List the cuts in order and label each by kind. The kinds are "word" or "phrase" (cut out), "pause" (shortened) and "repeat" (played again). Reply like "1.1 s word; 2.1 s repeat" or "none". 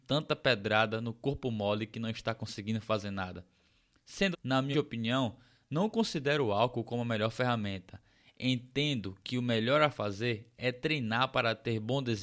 4.3 s word; 4.7 s word